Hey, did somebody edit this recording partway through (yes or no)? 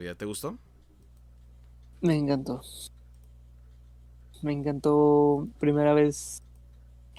yes